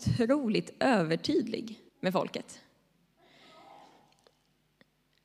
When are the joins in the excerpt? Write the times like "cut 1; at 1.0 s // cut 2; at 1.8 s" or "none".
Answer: cut 1; at 1.9 s